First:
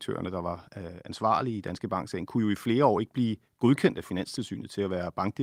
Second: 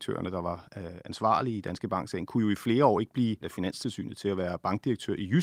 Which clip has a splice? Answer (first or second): second